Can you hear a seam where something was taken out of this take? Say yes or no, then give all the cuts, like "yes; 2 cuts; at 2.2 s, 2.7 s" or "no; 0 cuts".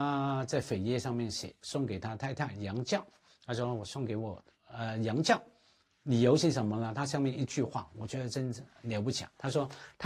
no; 0 cuts